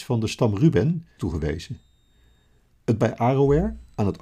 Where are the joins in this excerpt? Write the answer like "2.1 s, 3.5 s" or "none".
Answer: 1.2 s, 3.0 s